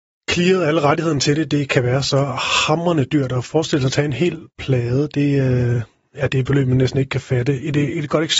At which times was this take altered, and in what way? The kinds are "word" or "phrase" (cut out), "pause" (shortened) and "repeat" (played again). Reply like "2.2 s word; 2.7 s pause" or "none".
none